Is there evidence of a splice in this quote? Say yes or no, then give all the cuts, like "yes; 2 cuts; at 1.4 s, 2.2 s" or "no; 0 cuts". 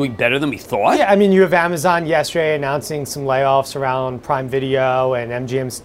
no; 0 cuts